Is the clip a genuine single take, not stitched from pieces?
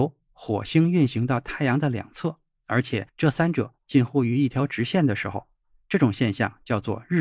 no; 1 cut; at 3.1 s

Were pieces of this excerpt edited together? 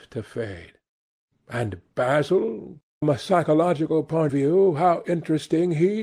yes; 2 cuts; at 3.0 s, 4.3 s

